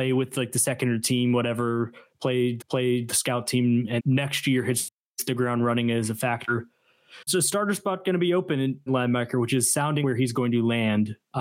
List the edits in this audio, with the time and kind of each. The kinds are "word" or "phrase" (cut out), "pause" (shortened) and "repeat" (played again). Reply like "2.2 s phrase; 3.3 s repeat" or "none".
1.0 s word; 2.6 s repeat; 4.0 s word; 7.3 s word; 8.9 s word; 10.0 s word